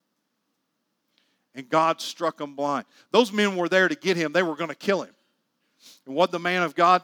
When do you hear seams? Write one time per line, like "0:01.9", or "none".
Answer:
none